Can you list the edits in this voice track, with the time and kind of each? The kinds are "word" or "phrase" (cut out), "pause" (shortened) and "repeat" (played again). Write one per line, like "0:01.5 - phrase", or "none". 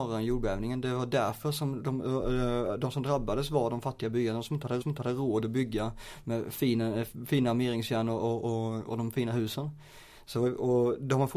0:04.8 - repeat